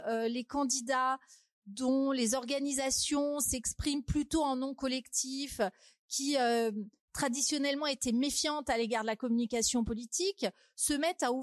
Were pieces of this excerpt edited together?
no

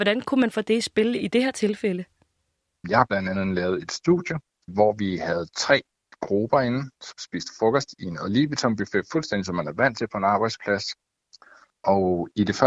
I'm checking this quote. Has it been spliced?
no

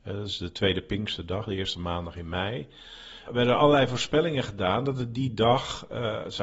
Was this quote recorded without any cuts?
yes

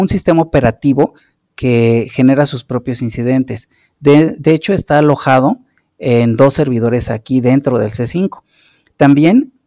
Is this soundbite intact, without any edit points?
yes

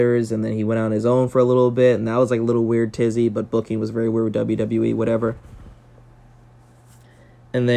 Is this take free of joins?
yes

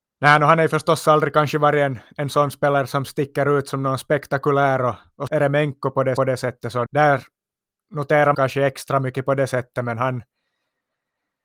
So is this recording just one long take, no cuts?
no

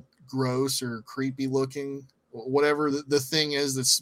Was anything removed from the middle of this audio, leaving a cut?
no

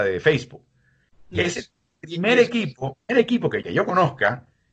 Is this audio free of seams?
no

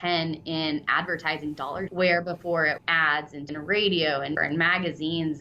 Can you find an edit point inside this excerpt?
yes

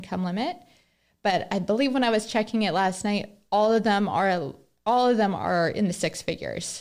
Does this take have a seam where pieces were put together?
no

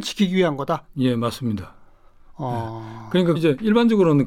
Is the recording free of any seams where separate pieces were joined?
no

